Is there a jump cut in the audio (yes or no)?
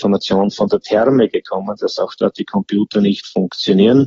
no